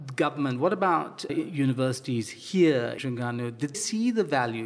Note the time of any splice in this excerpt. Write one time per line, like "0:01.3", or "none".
0:01.3
0:03.0
0:03.7

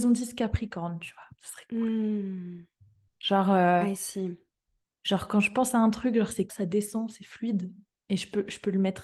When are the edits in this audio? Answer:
0:06.5

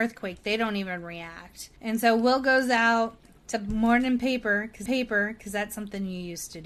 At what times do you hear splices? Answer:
0:01.8
0:03.5
0:04.9

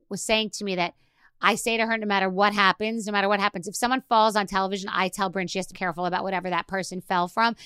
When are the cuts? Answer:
0:05.7

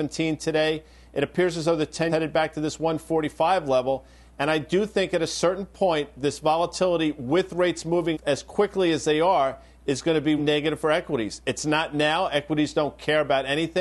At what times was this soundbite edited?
0:02.1
0:08.1
0:10.4

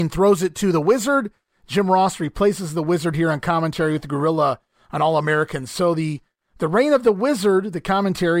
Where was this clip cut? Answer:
none

